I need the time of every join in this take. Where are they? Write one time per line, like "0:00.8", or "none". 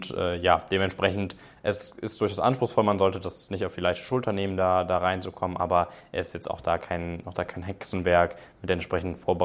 none